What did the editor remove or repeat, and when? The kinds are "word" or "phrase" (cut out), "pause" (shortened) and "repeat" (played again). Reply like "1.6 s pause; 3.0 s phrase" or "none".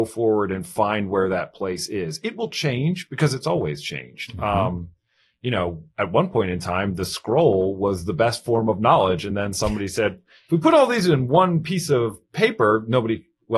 none